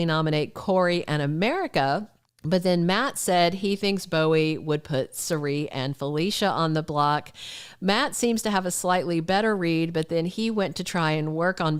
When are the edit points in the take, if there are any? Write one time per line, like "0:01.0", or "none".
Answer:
0:02.3